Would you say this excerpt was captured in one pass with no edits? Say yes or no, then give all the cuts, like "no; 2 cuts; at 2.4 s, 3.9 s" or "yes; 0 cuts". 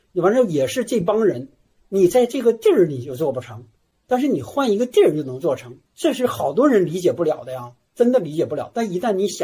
no; 1 cut; at 5.9 s